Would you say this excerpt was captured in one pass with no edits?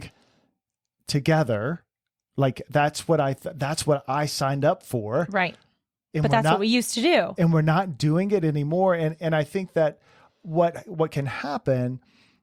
yes; 0 cuts

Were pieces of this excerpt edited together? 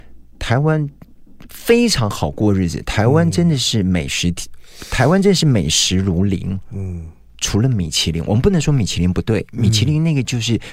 no; 0 cuts

